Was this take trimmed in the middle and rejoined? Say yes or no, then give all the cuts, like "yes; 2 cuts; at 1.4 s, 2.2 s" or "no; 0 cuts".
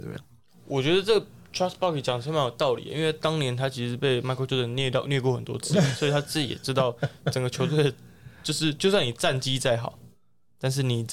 no; 0 cuts